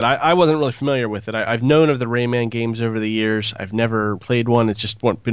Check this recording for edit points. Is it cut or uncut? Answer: cut